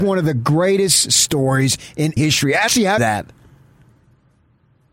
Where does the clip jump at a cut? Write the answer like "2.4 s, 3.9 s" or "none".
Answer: 2.2 s, 2.7 s, 3.0 s